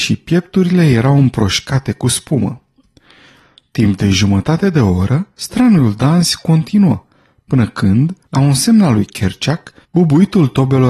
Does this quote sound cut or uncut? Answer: cut